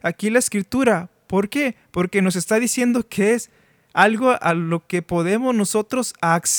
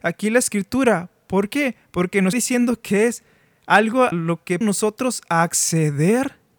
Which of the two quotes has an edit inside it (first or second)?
second